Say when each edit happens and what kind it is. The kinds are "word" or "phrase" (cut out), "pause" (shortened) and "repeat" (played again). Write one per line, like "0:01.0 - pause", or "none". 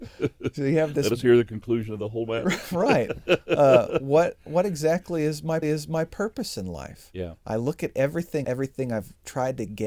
0:05.6 - repeat
0:08.4 - phrase

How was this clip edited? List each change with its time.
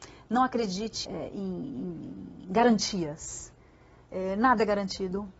0:01.0 - word

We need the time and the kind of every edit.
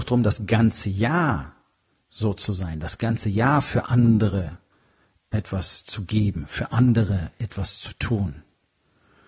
none

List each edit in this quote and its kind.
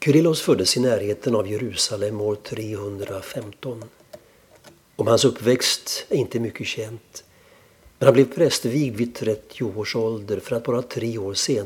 none

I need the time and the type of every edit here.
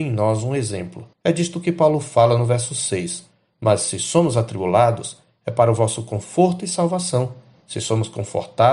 0:01.1 - pause

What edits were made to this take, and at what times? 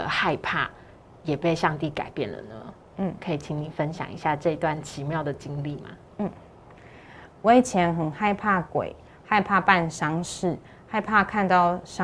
none

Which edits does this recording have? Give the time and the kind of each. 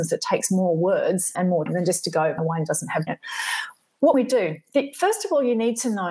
0:01.3 - word
0:01.7 - word
0:02.4 - word
0:03.1 - word
0:04.1 - word

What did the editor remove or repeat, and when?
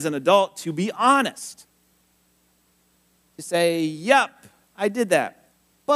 none

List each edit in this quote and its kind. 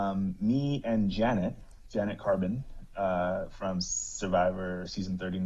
none

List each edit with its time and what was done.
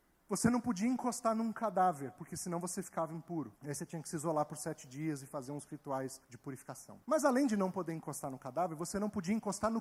0:03.6 - pause
0:06.2 - pause
0:07.0 - pause

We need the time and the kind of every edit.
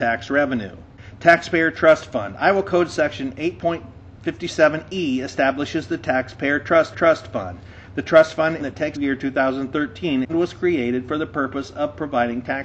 0:06.9 - repeat
0:08.6 - phrase
0:08.9 - phrase
0:10.3 - word

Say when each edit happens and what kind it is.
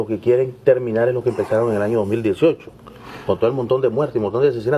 none

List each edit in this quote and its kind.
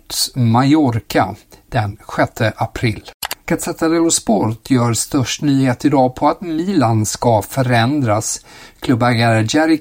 none

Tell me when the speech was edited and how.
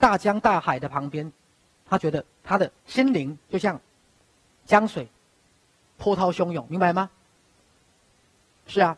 0:02.8 - pause
0:04.2 - pause

